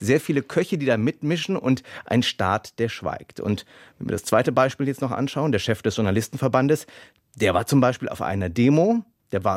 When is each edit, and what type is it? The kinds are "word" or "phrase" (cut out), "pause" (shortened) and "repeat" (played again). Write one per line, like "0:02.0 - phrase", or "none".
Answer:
none